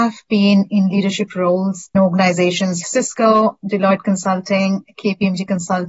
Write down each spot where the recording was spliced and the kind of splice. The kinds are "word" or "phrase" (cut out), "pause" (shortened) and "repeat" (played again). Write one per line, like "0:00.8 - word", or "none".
0:01.9 - word
0:02.8 - word